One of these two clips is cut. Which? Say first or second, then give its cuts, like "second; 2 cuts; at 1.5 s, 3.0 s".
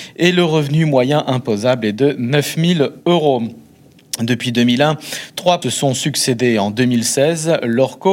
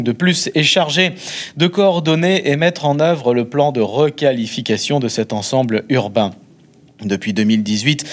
first; 1 cut; at 5.6 s